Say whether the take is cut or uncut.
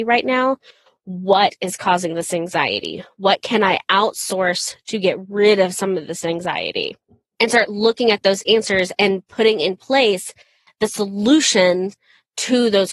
uncut